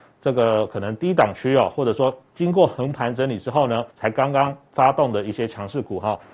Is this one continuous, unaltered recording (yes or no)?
no